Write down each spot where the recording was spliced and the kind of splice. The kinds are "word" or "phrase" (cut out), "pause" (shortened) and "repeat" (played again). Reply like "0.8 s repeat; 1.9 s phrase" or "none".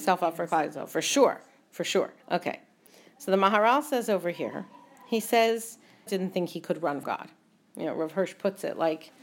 2.2 s pause; 6.1 s phrase; 7.0 s word